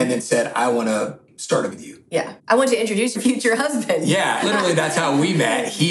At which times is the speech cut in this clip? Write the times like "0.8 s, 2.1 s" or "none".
1.7 s, 2.4 s, 3.1 s, 4.4 s